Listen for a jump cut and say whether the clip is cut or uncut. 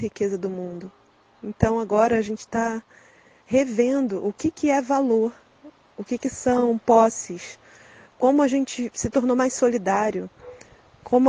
uncut